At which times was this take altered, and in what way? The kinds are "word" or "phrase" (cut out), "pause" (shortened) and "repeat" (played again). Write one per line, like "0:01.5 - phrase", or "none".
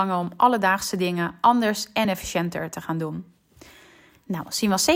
none